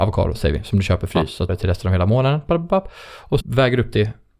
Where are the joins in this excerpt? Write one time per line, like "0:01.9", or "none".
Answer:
0:01.5
0:03.4